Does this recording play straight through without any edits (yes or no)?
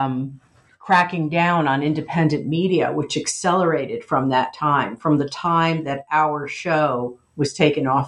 yes